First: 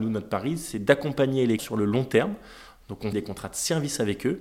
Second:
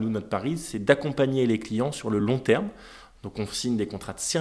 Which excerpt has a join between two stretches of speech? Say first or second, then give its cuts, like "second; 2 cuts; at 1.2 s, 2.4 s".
first; 2 cuts; at 1.6 s, 3.1 s